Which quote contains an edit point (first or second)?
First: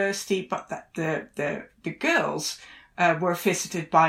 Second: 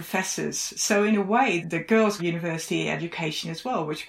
second